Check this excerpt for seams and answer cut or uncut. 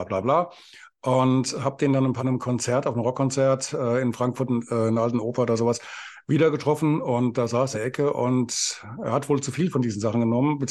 cut